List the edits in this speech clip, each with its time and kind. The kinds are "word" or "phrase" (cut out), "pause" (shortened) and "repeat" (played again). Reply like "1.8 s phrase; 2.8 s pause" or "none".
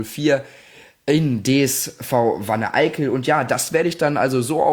none